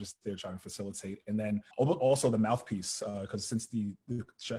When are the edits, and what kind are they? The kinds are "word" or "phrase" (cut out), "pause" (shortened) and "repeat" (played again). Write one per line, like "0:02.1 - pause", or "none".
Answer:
0:01.7 - pause